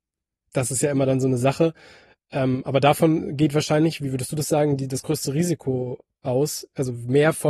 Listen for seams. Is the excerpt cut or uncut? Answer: uncut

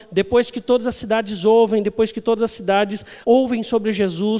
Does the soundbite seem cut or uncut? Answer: cut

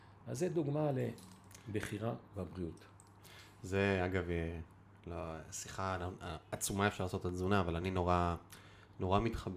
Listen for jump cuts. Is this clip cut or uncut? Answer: uncut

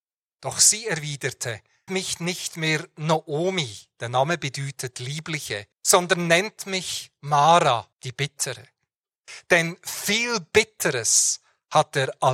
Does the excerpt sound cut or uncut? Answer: cut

